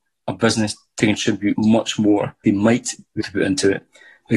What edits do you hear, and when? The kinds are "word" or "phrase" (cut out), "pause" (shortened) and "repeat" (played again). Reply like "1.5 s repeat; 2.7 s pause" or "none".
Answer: 1.5 s word; 2.4 s phrase; 3.2 s word